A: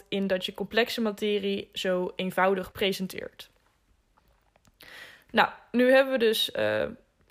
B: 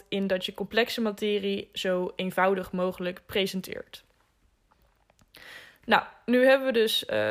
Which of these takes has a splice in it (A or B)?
A